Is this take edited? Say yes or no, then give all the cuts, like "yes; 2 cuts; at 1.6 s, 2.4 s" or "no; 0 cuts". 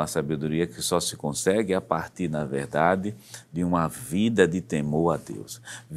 no; 0 cuts